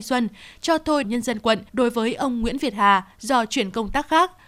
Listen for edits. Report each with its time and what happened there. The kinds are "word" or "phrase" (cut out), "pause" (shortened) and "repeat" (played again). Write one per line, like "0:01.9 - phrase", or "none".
0:01.0 - phrase
0:01.7 - pause